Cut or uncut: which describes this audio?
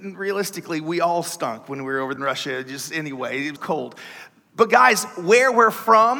cut